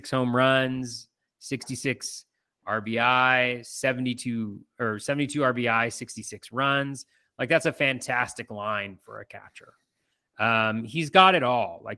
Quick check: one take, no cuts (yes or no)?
yes